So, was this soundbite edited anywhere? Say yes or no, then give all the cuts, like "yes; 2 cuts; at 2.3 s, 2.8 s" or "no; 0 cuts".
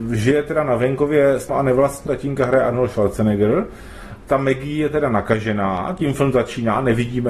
yes; 3 cuts; at 1.5 s, 2.1 s, 4.3 s